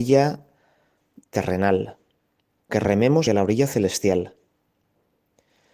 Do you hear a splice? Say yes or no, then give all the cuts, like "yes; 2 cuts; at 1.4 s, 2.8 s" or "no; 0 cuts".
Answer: yes; 2 cuts; at 2.7 s, 3.3 s